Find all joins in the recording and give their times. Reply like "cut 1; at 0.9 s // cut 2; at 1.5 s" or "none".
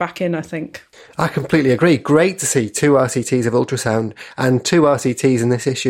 cut 1; at 0.9 s